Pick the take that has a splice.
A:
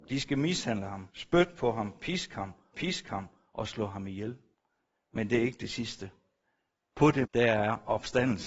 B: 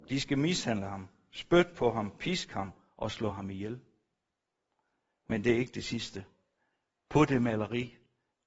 A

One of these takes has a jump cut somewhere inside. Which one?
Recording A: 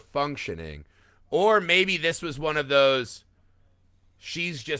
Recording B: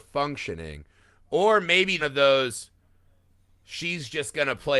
B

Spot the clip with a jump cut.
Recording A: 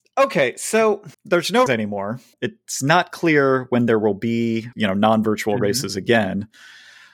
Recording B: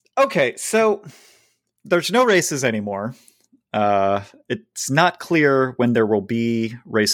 A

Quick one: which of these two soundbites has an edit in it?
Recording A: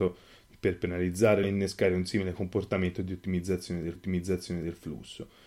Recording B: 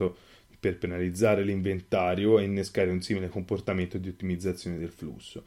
A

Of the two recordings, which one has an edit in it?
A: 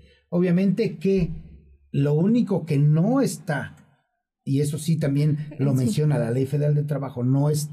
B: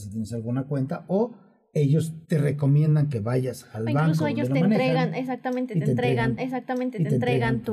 B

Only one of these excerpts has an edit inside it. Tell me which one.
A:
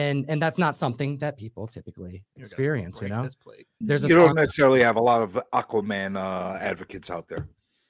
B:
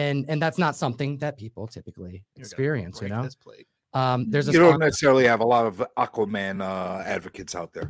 A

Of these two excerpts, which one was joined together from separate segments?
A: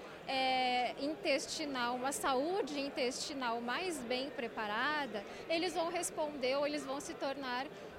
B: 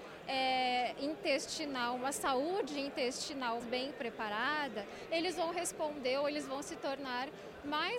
B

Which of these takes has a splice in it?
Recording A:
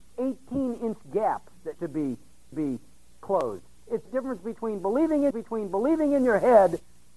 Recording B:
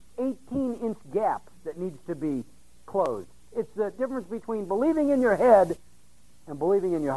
A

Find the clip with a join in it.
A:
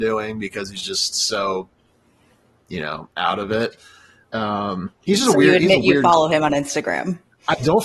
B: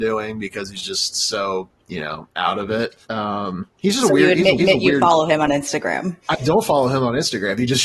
B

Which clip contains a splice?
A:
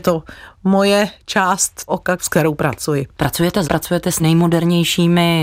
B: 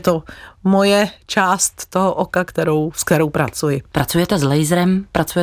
A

